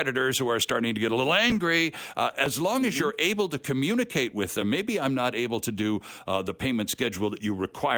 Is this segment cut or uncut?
uncut